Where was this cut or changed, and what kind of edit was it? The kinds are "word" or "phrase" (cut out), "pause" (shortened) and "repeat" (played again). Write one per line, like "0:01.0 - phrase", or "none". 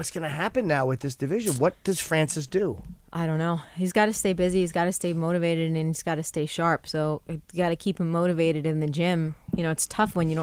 0:07.4 - pause